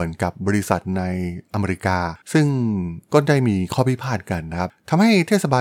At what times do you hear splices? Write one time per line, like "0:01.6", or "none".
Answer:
0:02.2